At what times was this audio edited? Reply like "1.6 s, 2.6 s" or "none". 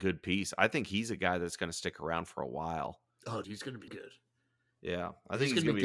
3.4 s, 3.9 s

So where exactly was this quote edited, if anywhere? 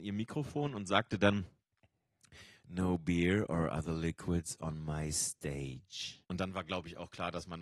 6.2 s

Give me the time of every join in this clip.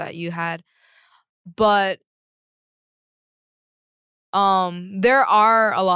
none

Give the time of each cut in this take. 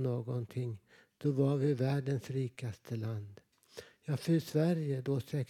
none

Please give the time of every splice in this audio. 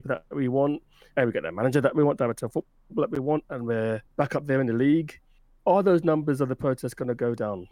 4.1 s

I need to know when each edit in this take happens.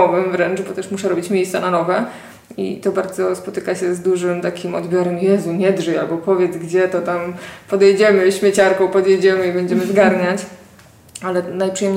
none

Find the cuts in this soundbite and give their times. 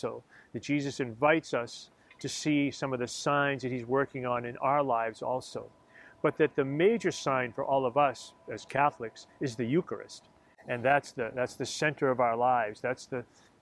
none

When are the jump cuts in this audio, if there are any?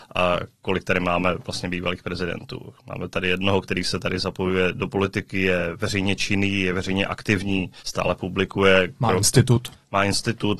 7.8 s

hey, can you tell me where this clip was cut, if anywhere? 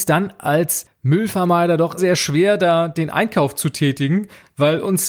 2.0 s

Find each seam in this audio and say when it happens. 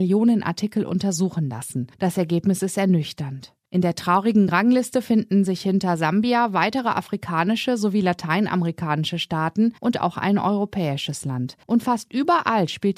1.9 s, 9.8 s, 11.6 s

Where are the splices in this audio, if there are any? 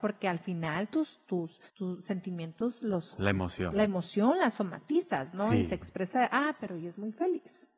1.7 s

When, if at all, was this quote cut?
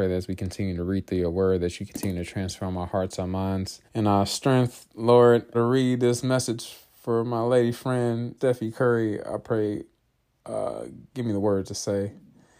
3.9 s, 5.5 s, 8.4 s

